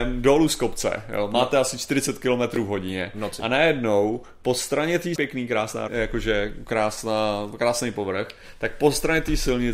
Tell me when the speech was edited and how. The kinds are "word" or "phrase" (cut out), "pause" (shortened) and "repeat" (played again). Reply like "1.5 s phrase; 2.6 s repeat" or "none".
5.2 s phrase; 5.9 s word